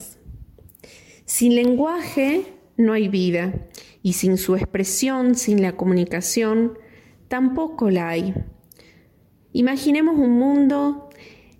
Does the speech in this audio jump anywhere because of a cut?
no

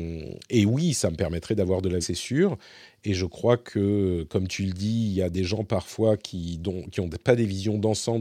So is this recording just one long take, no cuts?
no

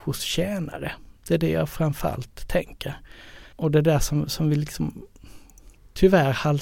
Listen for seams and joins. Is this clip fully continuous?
no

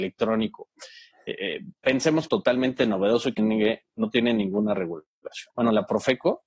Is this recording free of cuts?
no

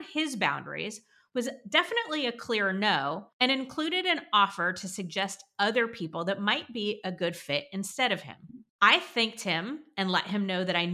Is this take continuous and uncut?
no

